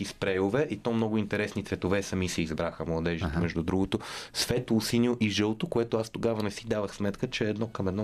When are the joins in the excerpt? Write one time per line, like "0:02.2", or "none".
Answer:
none